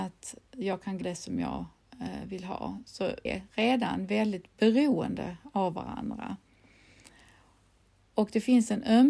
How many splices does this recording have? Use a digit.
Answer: 2